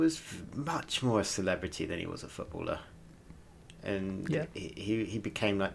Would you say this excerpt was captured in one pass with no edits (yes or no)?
yes